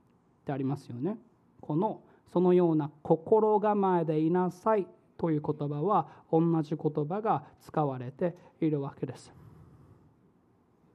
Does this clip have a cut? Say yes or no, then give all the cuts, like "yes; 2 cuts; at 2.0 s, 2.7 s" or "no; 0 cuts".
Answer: no; 0 cuts